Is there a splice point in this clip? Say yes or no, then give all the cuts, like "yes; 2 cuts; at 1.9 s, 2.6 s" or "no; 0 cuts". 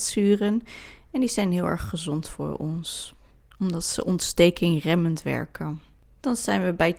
no; 0 cuts